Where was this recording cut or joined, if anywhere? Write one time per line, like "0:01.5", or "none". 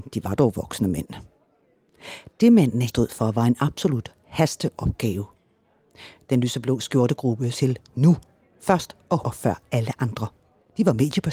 0:02.9
0:07.5
0:09.2